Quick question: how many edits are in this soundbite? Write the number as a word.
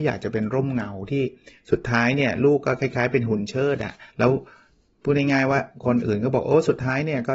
one